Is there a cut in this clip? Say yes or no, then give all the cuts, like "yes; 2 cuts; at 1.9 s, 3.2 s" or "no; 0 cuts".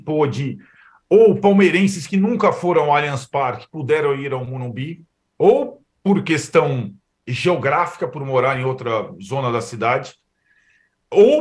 no; 0 cuts